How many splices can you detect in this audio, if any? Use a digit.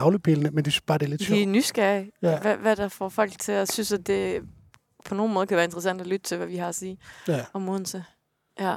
0